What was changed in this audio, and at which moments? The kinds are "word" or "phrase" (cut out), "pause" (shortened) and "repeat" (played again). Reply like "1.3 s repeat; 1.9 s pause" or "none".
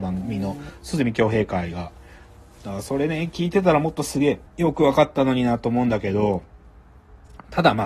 4.5 s pause